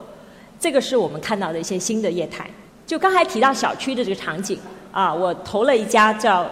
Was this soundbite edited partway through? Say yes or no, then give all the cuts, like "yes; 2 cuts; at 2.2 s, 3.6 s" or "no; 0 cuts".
no; 0 cuts